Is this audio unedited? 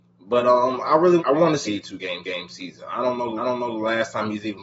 no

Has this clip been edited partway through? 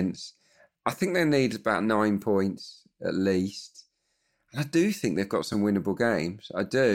no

